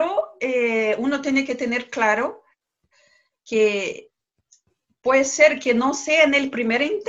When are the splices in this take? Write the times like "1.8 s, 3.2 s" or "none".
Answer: none